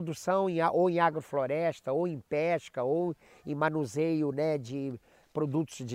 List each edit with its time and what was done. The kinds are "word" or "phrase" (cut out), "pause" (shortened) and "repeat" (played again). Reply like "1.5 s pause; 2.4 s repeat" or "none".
none